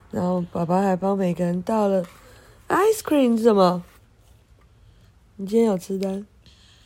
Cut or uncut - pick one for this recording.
uncut